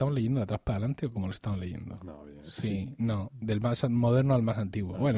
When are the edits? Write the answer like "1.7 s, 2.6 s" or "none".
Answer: none